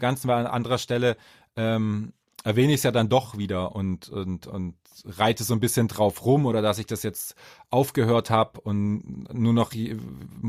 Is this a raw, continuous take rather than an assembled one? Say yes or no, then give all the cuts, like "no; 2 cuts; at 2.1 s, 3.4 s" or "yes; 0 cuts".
yes; 0 cuts